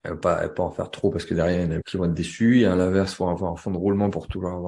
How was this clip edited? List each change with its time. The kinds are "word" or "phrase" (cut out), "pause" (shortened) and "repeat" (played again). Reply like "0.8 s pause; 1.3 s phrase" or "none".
1.8 s word